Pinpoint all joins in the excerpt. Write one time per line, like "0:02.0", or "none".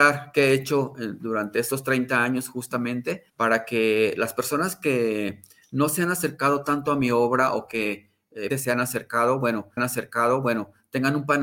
0:03.3
0:08.5
0:09.8